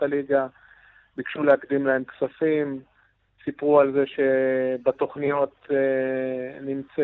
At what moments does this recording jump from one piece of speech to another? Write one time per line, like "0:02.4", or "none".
none